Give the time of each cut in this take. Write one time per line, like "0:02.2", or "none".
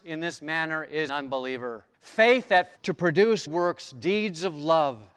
0:01.1
0:01.9
0:02.8
0:03.5